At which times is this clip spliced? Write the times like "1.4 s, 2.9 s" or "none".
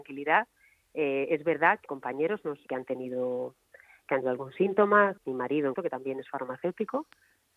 1.9 s, 2.7 s, 4.2 s, 5.2 s, 5.7 s

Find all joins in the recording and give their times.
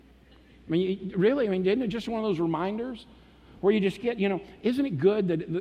none

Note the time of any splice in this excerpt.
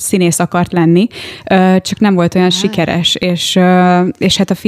none

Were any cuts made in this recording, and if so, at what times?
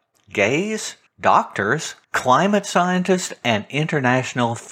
1.1 s, 2.0 s

